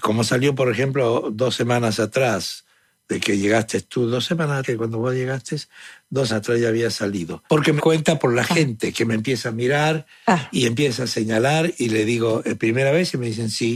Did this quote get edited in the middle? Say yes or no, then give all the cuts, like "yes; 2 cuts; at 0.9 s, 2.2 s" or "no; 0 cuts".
yes; 4 cuts; at 4.6 s, 6.3 s, 7.5 s, 7.8 s